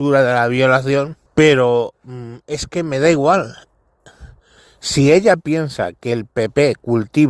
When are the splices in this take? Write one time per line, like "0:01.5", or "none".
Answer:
0:01.3

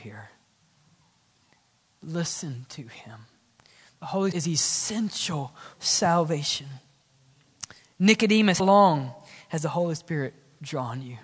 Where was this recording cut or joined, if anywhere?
0:04.3
0:05.7
0:08.6

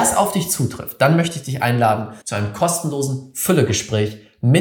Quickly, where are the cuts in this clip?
0:02.2

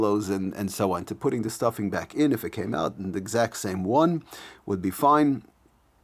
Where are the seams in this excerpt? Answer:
none

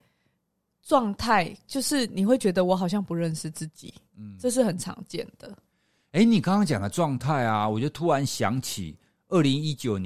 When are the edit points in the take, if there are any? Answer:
none

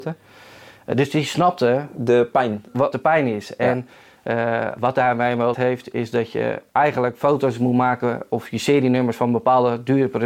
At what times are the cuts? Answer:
0:02.9
0:05.5

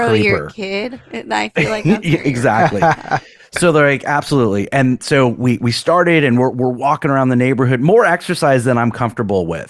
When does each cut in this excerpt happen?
none

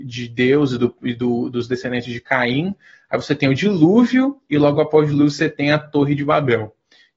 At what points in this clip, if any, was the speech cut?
none

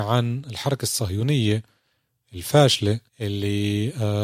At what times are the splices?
0:03.1

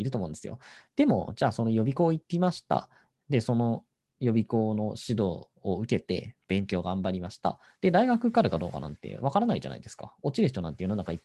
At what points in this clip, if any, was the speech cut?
0:05.5

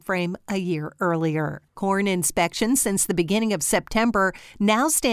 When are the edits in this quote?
0:01.7

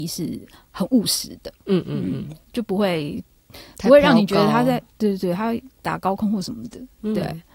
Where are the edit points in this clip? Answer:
0:05.7

